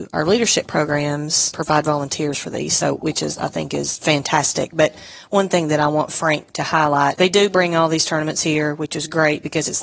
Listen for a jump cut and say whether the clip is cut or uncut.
uncut